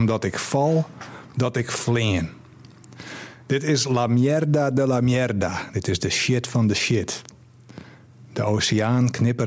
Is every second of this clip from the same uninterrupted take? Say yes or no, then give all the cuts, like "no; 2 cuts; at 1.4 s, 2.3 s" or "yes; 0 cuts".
yes; 0 cuts